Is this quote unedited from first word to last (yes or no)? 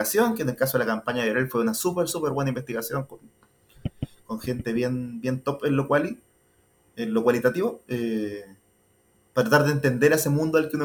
yes